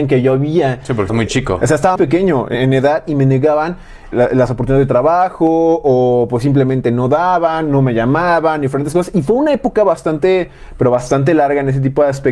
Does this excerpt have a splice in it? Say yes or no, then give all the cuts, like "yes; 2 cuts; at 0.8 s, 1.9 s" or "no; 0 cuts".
yes; 4 cuts; at 1.1 s, 2.0 s, 2.5 s, 4.1 s